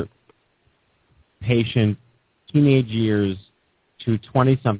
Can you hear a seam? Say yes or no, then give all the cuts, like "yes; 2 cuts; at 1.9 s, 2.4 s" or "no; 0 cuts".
yes; 1 cut; at 2.5 s